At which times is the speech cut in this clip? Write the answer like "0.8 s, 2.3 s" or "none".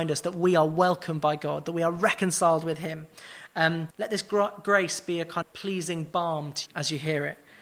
3.9 s, 5.4 s, 6.7 s